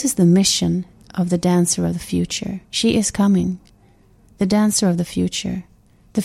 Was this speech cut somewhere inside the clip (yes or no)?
yes